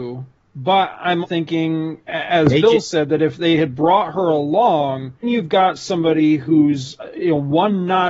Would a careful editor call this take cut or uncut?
cut